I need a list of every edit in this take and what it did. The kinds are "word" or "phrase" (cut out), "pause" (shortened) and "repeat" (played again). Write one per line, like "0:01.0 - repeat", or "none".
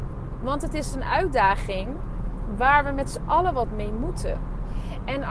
none